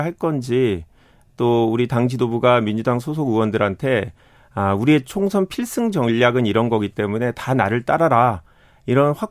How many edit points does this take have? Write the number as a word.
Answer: zero